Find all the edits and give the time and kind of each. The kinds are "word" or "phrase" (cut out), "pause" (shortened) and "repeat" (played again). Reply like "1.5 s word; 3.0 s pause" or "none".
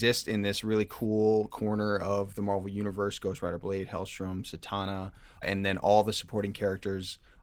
none